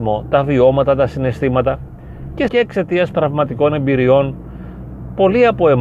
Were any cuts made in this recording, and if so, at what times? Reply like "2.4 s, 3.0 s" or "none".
2.5 s, 3.1 s